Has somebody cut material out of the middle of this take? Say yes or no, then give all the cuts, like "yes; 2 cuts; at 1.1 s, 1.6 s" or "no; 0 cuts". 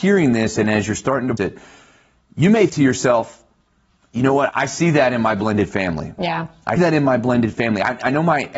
yes; 4 cuts; at 1.4 s, 2.7 s, 4.5 s, 6.8 s